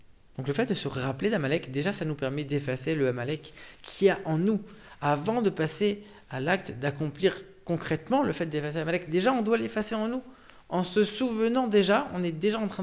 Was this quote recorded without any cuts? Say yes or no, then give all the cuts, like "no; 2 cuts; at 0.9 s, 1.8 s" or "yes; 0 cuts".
yes; 0 cuts